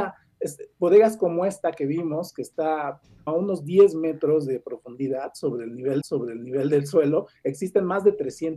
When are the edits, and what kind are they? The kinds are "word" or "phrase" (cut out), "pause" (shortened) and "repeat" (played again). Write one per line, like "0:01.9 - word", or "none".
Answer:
0:03.3 - phrase
0:06.0 - repeat